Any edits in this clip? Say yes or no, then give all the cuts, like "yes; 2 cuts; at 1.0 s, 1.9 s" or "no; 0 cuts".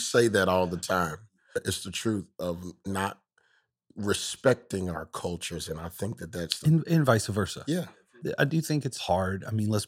no; 0 cuts